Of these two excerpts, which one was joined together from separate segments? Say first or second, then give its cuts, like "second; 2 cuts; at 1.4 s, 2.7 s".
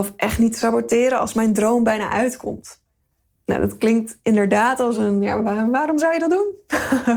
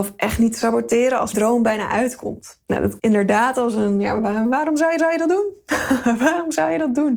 second; 4 cuts; at 1.3 s, 2.6 s, 3.0 s, 5.0 s